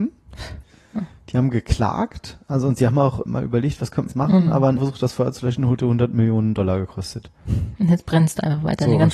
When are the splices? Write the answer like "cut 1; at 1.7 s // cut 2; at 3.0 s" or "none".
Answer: cut 1; at 3.3 s // cut 2; at 4.1 s // cut 3; at 4.8 s // cut 4; at 5.8 s